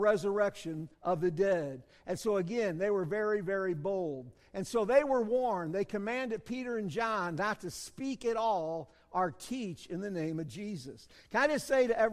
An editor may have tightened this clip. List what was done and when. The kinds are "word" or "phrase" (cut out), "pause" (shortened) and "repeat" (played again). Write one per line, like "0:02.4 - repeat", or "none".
0:00.9 - pause